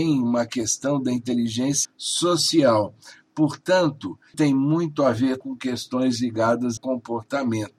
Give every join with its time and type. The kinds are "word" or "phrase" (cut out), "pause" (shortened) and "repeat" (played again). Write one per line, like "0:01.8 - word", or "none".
0:01.8 - word
0:04.3 - word
0:05.4 - word
0:06.8 - word